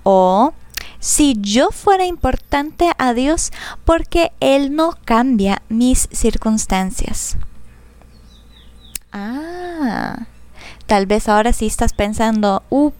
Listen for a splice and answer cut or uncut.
uncut